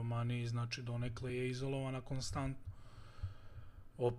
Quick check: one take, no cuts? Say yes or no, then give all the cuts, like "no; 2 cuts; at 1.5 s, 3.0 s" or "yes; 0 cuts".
yes; 0 cuts